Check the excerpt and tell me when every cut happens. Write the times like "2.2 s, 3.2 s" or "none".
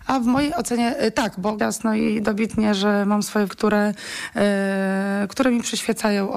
1.6 s, 3.5 s